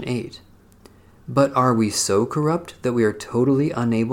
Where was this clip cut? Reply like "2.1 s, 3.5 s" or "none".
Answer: none